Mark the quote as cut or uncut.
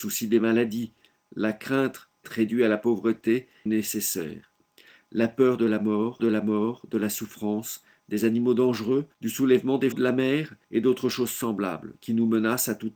cut